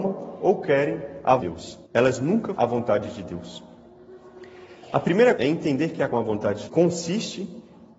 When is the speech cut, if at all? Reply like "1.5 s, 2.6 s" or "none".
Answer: 1.4 s, 1.8 s, 2.5 s, 5.4 s, 6.1 s, 6.6 s